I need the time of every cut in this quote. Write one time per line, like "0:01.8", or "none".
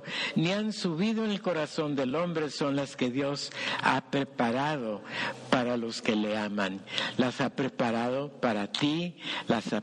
none